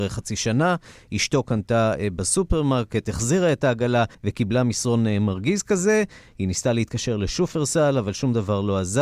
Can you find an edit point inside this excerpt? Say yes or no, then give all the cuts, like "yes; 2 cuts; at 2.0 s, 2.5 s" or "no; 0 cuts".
yes; 1 cut; at 4.1 s